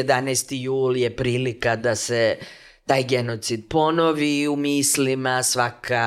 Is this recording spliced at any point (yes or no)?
no